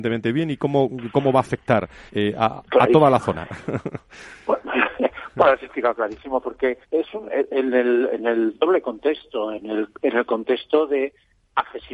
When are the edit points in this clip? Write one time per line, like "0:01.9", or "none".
0:02.1
0:06.8

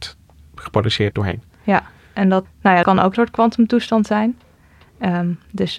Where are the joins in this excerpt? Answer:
0:01.1
0:02.4
0:02.8
0:03.1

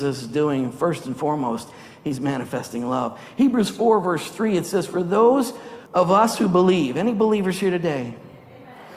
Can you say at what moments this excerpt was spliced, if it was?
0:05.9

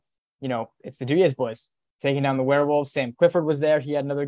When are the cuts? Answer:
none

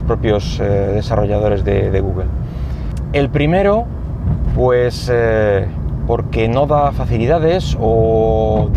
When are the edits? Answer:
none

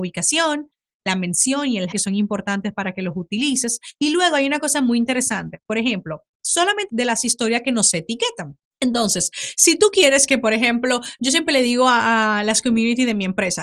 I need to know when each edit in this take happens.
0:01.9
0:03.9
0:06.9
0:08.7

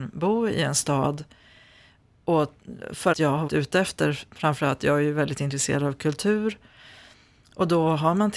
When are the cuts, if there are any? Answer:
0:03.1
0:03.5

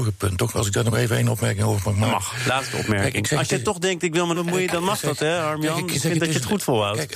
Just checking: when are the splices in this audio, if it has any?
0:04.3

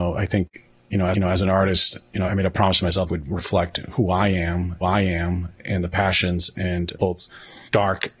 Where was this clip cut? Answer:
0:01.1
0:02.3
0:03.1
0:04.8

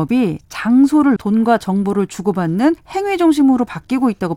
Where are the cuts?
0:01.2
0:02.8

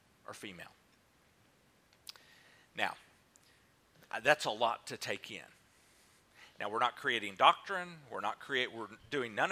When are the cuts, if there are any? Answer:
none

